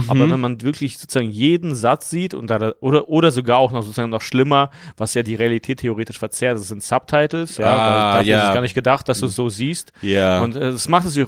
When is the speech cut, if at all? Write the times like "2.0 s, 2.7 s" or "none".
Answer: none